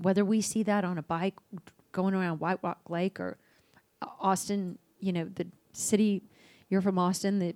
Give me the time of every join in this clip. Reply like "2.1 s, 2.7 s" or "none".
none

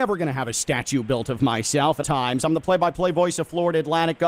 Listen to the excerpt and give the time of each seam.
2.0 s

